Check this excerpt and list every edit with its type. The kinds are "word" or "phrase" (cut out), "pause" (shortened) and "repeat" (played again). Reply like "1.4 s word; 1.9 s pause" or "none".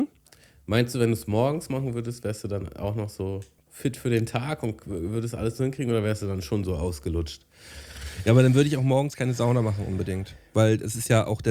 3.6 s pause